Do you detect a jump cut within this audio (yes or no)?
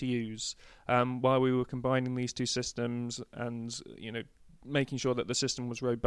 no